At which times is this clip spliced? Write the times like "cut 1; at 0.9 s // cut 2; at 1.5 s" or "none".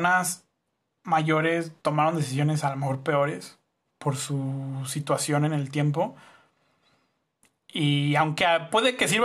cut 1; at 1.8 s